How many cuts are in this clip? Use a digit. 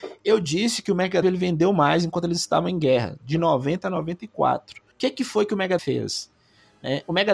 3